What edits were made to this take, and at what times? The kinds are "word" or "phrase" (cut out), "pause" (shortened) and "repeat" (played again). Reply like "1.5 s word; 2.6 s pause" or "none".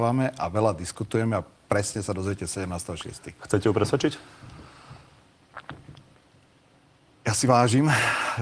7.5 s word

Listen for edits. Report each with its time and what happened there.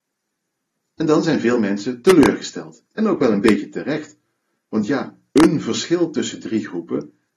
5.3 s pause

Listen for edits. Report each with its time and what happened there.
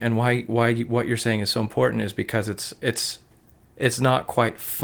none

